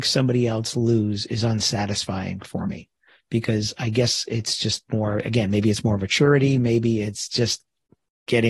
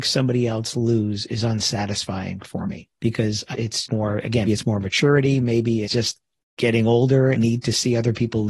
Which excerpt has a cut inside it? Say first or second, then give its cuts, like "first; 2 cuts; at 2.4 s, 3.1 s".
second; 7 cuts; at 2.9 s, 3.5 s, 3.8 s, 4.5 s, 5.8 s, 6.4 s, 7.3 s